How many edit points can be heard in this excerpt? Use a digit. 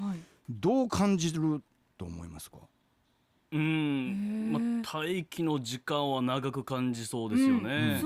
0